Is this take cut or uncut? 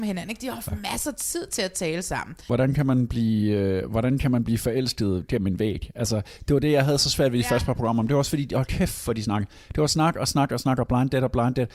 uncut